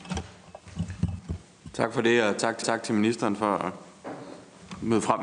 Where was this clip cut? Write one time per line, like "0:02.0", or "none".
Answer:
0:02.6